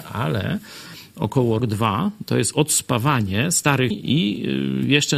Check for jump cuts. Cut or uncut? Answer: cut